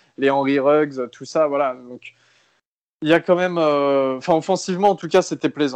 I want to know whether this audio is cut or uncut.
uncut